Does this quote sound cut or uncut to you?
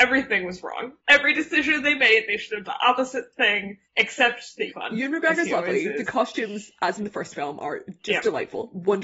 cut